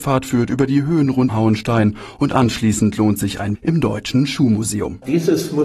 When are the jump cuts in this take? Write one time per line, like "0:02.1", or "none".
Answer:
0:01.3
0:03.5